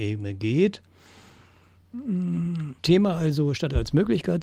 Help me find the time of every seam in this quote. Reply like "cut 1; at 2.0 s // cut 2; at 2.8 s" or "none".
cut 1; at 2.8 s